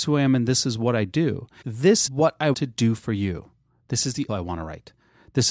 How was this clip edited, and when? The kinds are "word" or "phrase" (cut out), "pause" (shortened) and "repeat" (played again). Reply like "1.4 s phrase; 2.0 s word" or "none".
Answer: 1.6 s word; 2.1 s word; 2.5 s word; 4.3 s word